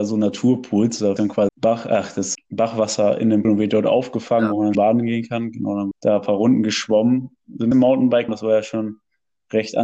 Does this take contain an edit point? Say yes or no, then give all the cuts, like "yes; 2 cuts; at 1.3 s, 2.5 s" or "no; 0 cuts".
yes; 8 cuts; at 1.2 s, 1.5 s, 2.3 s, 3.4 s, 4.7 s, 5.9 s, 7.7 s, 8.3 s